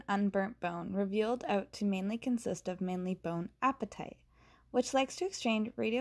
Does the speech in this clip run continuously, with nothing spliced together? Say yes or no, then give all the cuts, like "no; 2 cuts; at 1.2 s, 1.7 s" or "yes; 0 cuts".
yes; 0 cuts